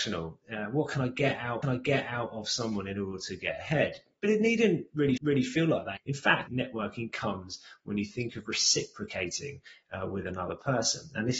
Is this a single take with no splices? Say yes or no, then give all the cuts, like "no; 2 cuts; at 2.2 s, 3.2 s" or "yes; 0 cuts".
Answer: no; 3 cuts; at 1.6 s, 5.2 s, 6.5 s